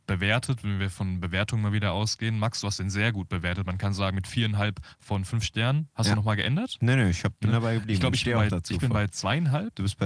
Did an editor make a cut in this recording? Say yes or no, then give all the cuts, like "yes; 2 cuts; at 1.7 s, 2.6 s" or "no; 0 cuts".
no; 0 cuts